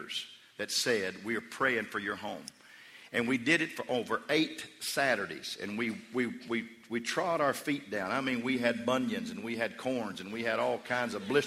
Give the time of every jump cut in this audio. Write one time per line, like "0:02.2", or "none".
none